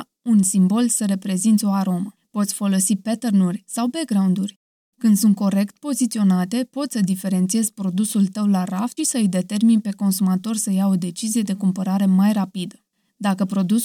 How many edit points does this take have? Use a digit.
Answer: 1